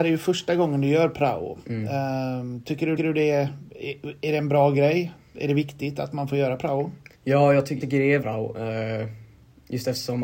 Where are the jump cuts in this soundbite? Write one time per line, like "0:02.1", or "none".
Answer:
0:03.0
0:07.1
0:07.8
0:08.2